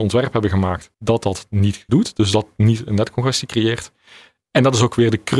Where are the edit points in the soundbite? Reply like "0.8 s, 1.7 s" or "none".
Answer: 0.9 s, 1.9 s